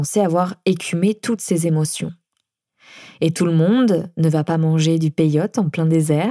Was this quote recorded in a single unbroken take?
yes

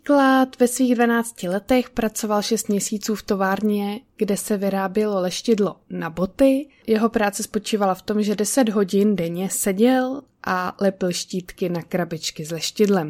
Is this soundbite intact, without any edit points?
no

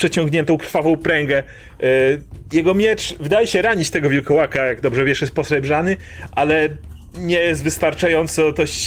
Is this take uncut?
yes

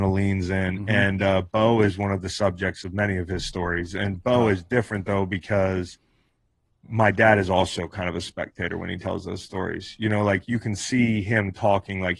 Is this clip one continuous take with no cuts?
yes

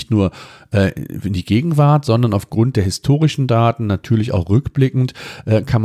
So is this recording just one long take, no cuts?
yes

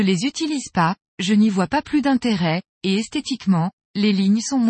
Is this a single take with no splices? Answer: yes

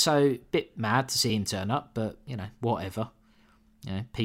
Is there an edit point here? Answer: no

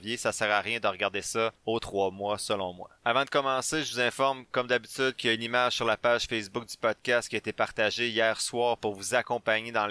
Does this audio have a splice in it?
yes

